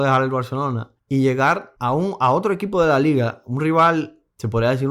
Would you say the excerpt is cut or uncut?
uncut